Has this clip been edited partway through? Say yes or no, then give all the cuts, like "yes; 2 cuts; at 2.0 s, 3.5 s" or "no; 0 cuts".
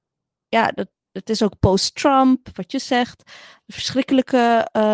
no; 0 cuts